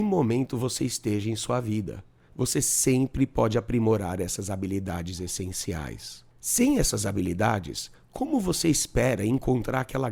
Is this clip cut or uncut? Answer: uncut